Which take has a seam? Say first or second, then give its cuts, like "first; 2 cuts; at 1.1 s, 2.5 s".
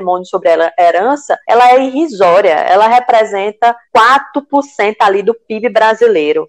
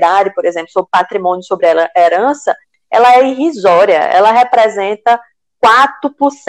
first; 2 cuts; at 1.4 s, 3.8 s